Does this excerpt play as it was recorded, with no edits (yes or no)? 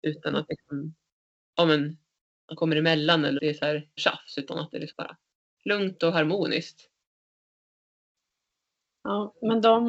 no